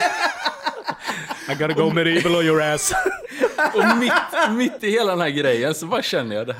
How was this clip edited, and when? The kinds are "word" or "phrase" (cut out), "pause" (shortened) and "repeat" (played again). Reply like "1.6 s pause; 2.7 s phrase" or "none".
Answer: none